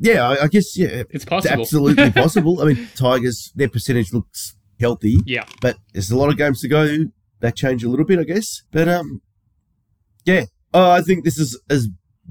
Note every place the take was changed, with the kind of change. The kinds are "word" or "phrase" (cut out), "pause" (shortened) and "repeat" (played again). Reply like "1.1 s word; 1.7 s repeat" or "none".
1.1 s word; 2.9 s phrase; 4.8 s word; 5.8 s pause; 7.6 s word; 8.6 s pause